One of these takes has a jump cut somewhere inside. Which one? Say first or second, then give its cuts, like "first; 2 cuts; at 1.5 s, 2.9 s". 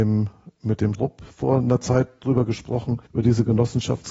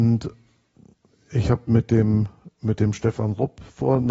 first; 2 cuts; at 0.9 s, 3.1 s